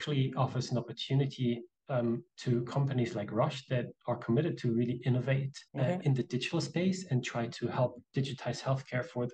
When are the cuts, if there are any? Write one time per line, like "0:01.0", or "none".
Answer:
0:05.7

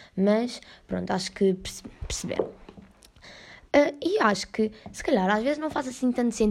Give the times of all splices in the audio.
none

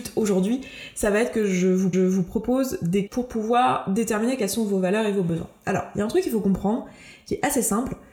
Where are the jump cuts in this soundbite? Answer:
0:01.9
0:03.1

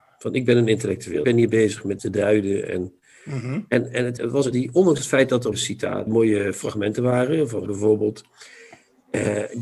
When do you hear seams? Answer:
0:01.2
0:02.0
0:04.2
0:04.5
0:05.5
0:06.1
0:07.7

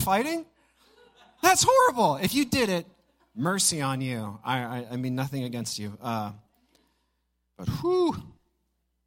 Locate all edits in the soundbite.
none

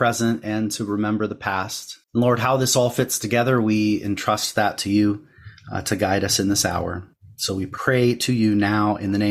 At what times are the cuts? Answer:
0:02.0
0:07.1

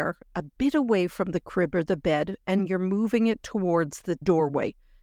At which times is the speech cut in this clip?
none

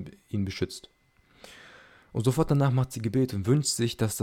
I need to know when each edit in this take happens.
none

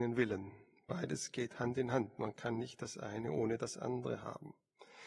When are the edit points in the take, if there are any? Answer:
none

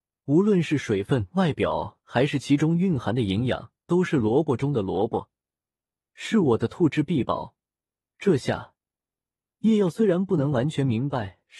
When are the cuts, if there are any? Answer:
0:03.8

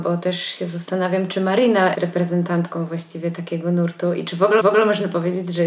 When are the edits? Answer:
0:01.9
0:04.6

